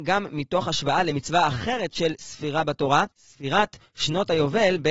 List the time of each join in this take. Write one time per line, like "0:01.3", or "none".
0:03.1